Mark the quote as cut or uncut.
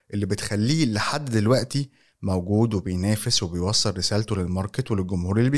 uncut